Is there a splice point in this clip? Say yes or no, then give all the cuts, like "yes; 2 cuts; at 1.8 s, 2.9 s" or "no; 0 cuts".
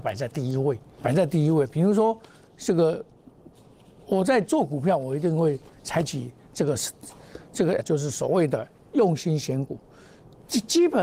yes; 2 cuts; at 1.0 s, 7.8 s